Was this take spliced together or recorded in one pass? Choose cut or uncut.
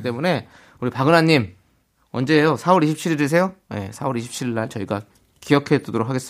uncut